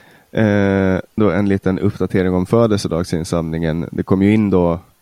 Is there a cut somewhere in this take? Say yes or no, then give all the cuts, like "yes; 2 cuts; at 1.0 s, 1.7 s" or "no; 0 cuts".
yes; 1 cut; at 1.2 s